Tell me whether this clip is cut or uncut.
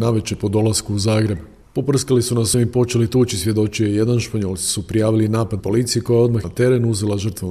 cut